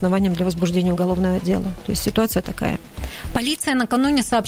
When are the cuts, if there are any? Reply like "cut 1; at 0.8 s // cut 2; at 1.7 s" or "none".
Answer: none